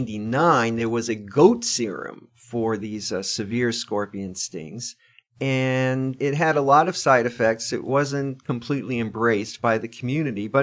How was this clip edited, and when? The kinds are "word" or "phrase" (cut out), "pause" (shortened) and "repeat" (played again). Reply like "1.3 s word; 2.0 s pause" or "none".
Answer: none